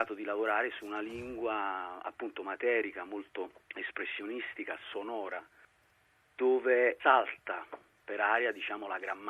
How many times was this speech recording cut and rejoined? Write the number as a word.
two